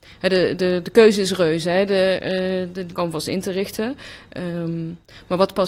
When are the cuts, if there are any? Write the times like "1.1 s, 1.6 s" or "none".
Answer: 2.9 s